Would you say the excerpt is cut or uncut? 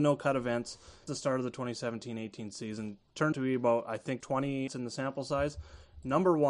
cut